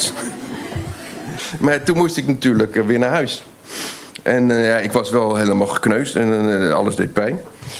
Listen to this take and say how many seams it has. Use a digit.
0